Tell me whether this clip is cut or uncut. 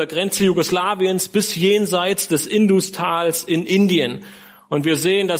uncut